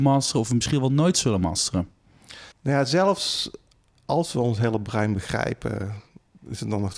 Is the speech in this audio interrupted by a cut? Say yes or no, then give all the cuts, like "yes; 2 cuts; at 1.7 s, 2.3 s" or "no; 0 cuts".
yes; 1 cut; at 2.5 s